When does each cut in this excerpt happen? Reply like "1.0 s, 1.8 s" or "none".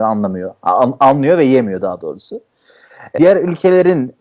3.2 s